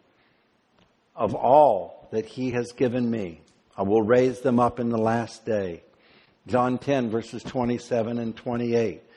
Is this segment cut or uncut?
uncut